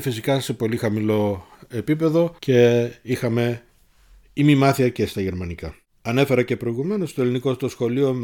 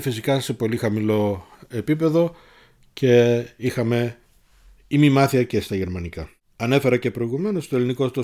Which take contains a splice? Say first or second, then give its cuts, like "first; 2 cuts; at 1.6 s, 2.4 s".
first; 1 cut; at 2.4 s